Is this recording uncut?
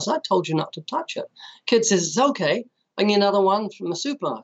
yes; 0 cuts

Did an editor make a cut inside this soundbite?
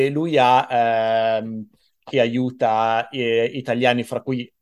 yes; 1 cut; at 2.1 s

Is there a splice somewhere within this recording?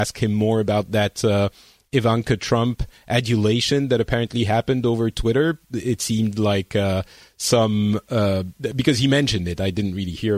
no; 0 cuts

